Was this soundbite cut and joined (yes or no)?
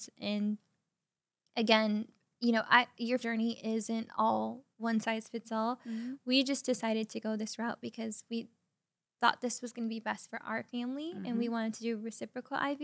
yes